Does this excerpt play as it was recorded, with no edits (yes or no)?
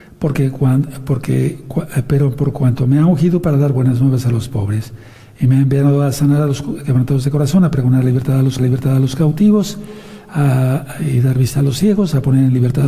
no